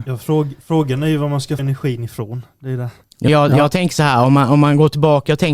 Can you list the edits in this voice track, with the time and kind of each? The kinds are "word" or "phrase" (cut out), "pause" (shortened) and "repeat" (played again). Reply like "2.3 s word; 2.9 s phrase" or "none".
1.6 s word; 3.3 s word

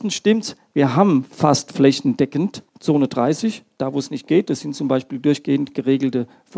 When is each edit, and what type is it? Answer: 2.7 s pause

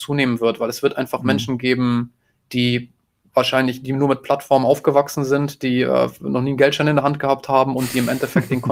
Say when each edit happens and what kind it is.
none

